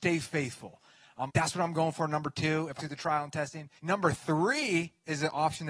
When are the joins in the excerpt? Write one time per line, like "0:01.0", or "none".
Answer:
0:01.3
0:02.8
0:03.8